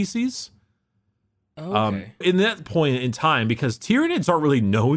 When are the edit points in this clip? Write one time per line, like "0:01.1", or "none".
0:02.2